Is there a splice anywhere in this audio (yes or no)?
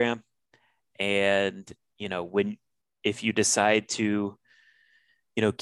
no